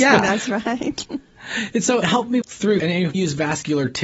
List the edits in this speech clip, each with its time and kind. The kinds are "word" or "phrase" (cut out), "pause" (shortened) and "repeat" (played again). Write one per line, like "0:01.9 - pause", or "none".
0:02.0 - phrase
0:02.4 - word
0:02.8 - word
0:03.1 - word